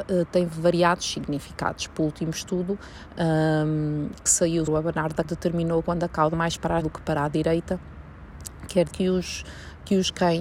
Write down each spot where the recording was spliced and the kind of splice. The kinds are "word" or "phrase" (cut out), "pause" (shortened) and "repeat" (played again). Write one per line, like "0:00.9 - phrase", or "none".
0:02.0 - word
0:04.7 - word
0:05.2 - word
0:05.8 - word
0:06.3 - word
0:06.8 - word
0:08.9 - word